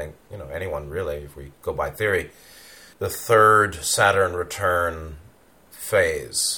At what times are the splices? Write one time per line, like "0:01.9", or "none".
0:01.5
0:02.9